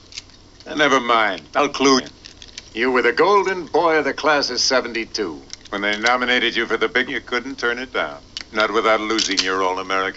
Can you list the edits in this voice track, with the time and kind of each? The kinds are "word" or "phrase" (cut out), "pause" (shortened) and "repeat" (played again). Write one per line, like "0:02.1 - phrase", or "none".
0:02.0 - word
0:02.7 - pause
0:07.1 - word